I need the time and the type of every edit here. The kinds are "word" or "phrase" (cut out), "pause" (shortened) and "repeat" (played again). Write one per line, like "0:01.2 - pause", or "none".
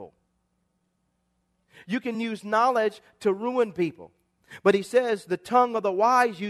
none